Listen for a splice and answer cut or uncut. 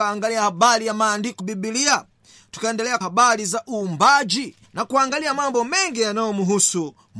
cut